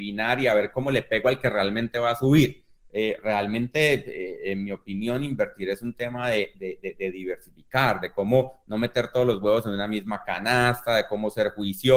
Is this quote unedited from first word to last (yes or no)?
yes